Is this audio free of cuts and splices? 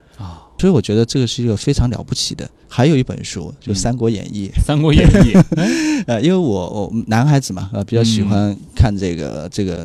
yes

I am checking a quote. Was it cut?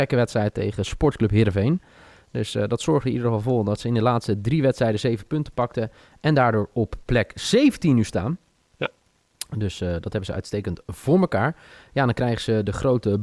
no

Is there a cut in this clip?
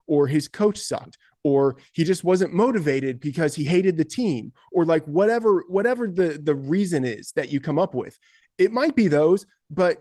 no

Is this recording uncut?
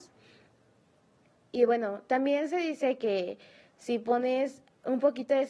yes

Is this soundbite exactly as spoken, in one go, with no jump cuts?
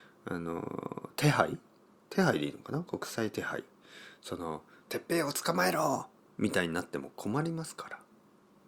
yes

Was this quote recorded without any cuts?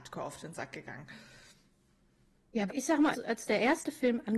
no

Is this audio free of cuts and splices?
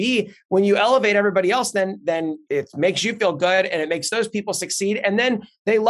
yes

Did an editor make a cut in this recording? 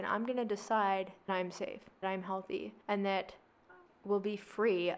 yes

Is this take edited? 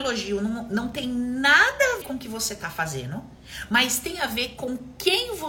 yes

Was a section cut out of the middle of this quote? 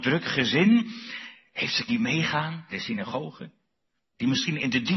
yes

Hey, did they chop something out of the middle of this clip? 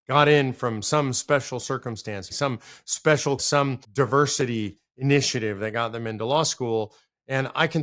yes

